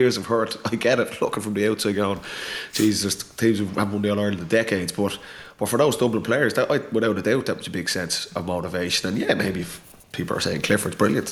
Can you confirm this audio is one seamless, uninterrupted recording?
yes; 0 cuts

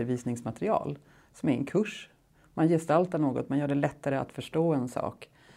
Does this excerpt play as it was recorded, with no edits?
yes; 0 cuts

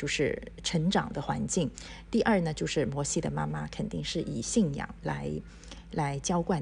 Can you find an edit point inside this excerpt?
no; 0 cuts

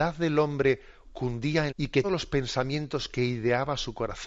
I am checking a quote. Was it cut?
yes; 2 cuts; at 1.7 s, 2.0 s

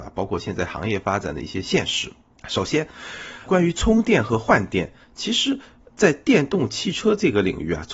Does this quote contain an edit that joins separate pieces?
yes; 2 cuts; at 2.3 s, 3.5 s

